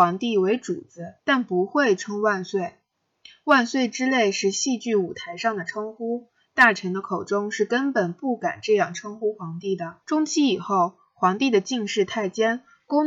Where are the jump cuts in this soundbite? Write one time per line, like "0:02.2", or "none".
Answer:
0:01.2
0:10.0